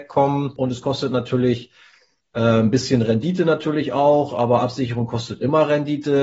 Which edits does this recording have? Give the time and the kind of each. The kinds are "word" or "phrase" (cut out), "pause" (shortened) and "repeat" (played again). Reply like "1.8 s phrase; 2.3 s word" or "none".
none